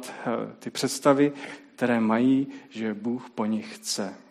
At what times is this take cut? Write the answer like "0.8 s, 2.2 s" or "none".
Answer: none